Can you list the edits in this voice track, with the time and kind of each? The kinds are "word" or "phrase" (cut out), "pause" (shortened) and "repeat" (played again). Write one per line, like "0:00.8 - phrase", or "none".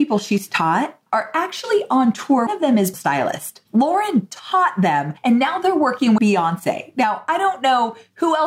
0:01.1 - pause
0:02.5 - phrase
0:02.9 - phrase
0:03.7 - pause
0:05.2 - pause
0:06.2 - word